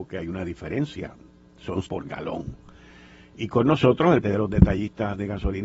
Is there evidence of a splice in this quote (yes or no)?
yes